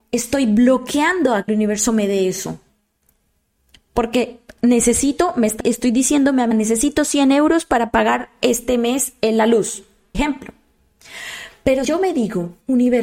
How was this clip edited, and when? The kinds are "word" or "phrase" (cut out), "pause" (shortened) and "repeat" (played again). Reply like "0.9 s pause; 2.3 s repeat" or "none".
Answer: 1.5 s word; 5.6 s word; 6.5 s word; 10.1 s word; 11.8 s word

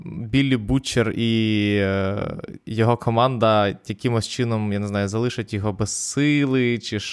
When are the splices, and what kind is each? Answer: none

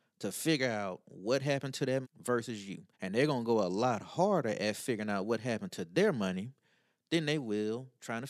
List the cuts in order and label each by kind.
2.0 s word; 2.9 s pause

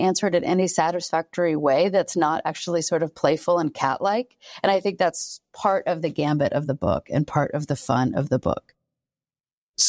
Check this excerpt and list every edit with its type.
none

